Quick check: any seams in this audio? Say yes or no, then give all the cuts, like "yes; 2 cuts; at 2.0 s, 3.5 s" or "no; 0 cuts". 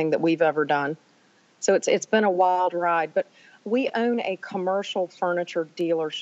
no; 0 cuts